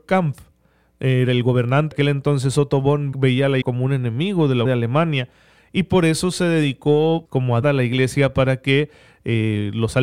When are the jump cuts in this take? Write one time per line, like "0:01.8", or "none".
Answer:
0:01.9
0:03.1
0:03.6
0:04.7
0:07.3
0:07.6